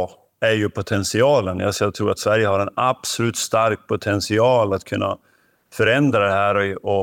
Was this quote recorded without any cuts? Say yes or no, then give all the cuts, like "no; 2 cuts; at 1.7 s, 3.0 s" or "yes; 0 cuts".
yes; 0 cuts